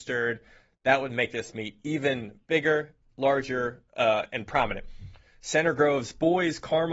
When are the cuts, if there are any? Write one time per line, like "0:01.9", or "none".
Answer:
none